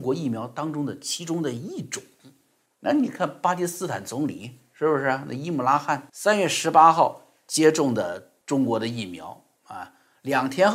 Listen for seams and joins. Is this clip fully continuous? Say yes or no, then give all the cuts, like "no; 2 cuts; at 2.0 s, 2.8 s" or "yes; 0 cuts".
no; 3 cuts; at 2.7 s, 6.1 s, 8.4 s